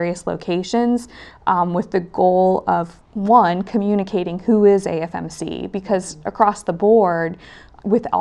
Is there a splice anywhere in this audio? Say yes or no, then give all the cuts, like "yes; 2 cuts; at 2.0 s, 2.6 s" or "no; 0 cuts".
no; 0 cuts